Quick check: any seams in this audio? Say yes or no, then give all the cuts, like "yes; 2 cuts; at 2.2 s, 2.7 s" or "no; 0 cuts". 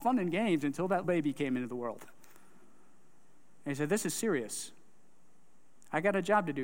yes; 1 cut; at 1.0 s